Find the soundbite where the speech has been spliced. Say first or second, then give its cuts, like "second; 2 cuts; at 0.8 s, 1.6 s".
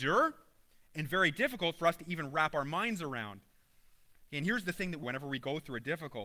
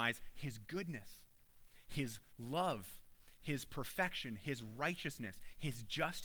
first; 1 cut; at 5.0 s